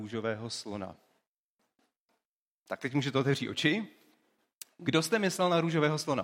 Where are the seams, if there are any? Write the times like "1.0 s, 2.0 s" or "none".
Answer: none